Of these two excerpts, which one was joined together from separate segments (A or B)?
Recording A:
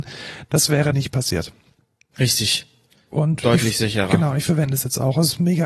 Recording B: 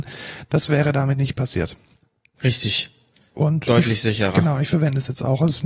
A